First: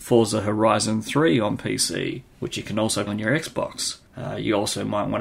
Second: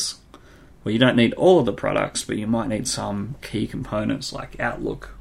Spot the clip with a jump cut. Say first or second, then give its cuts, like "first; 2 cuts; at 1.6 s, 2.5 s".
first; 3 cuts; at 2.3 s, 3.1 s, 4.1 s